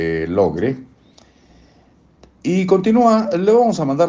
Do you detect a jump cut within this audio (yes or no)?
no